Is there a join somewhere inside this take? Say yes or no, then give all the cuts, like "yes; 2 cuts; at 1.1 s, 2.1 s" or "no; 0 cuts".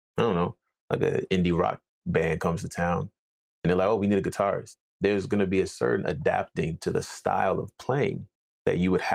no; 0 cuts